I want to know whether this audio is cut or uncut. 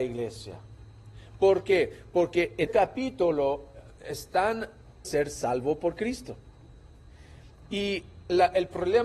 cut